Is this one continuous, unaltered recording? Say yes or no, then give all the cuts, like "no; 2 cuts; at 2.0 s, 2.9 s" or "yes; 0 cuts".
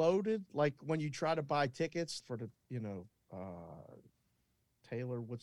no; 1 cut; at 2.2 s